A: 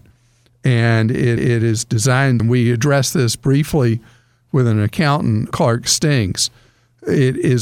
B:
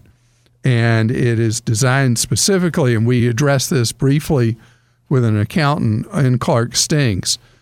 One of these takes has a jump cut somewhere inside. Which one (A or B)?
A